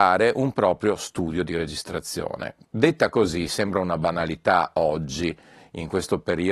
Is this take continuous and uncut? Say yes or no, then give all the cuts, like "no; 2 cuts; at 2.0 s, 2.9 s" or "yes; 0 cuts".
yes; 0 cuts